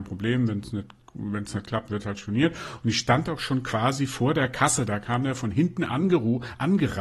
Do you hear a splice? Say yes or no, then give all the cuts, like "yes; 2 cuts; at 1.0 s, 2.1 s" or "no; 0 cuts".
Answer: no; 0 cuts